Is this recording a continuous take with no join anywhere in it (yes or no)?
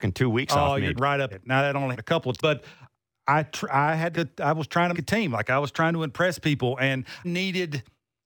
no